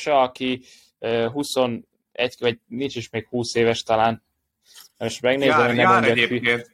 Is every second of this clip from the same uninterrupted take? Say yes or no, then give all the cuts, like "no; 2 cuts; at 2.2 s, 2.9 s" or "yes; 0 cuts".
yes; 0 cuts